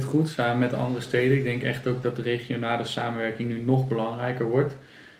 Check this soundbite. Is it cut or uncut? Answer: uncut